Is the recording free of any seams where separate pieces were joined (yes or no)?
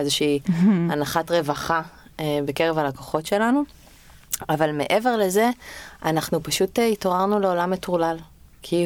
yes